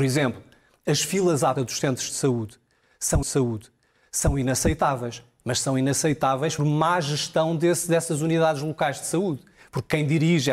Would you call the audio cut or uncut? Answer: cut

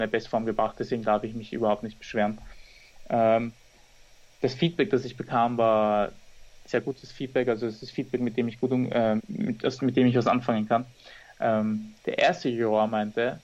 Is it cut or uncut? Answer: cut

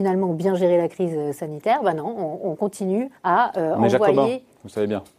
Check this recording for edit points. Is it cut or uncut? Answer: cut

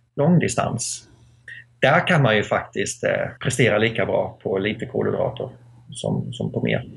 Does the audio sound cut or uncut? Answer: cut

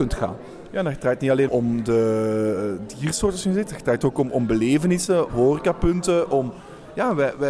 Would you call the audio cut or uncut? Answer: cut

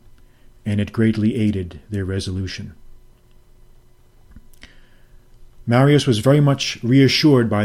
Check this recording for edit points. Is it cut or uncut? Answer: uncut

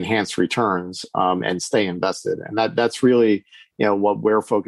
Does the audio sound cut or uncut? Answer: uncut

